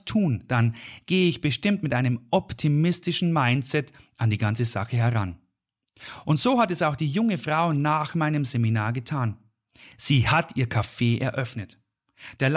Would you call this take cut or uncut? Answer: uncut